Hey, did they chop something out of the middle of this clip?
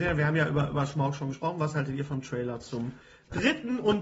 no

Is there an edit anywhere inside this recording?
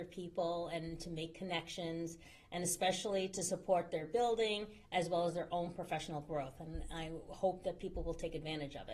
no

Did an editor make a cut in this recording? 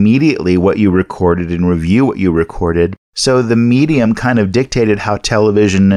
yes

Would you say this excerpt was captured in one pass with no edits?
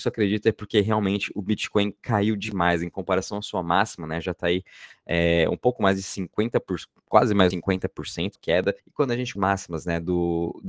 no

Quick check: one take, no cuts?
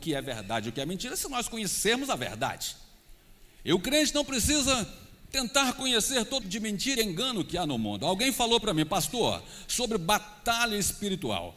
no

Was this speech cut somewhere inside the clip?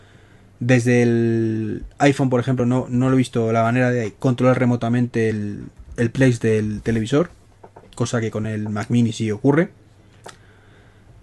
no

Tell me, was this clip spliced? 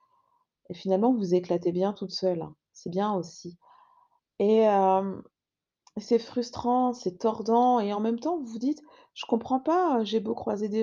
no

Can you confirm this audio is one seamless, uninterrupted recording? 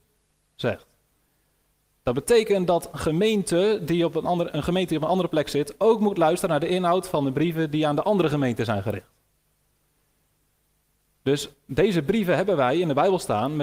yes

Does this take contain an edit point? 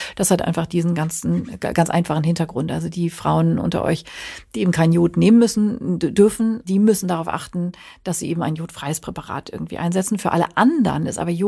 no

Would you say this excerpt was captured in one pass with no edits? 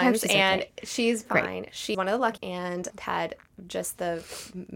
no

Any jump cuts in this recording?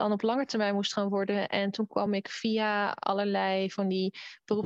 no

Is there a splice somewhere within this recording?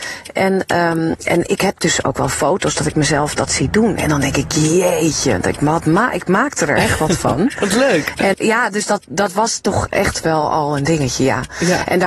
yes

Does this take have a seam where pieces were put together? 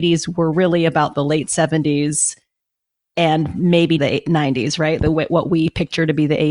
yes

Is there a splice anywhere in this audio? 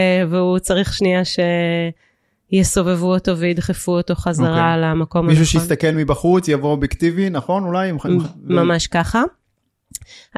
no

